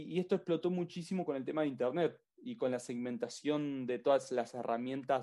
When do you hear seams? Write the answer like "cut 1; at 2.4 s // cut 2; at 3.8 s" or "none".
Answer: none